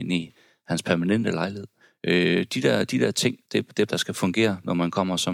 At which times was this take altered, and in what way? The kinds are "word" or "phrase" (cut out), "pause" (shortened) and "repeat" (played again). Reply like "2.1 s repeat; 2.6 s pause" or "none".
1.8 s pause; 3.4 s pause; 3.9 s phrase